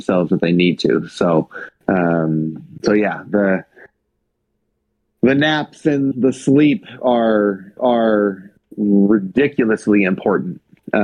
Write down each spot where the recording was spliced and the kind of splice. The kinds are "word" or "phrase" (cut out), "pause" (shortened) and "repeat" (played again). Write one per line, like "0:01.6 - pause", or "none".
0:06.1 - word
0:07.8 - repeat